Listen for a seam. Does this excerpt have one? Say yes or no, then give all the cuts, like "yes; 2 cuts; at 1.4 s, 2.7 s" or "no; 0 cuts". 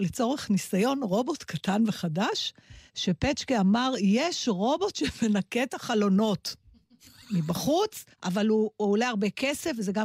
yes; 2 cuts; at 2.9 s, 8.1 s